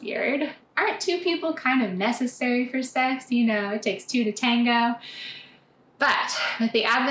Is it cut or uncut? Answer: uncut